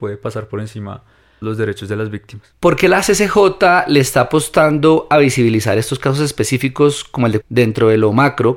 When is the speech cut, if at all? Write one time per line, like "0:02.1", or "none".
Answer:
0:01.4
0:07.4